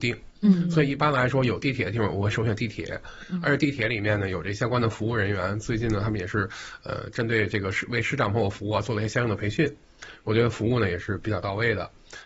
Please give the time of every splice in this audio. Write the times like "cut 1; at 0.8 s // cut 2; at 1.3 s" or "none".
none